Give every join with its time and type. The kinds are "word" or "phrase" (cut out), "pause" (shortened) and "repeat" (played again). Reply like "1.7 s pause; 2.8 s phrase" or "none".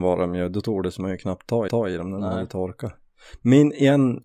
1.7 s repeat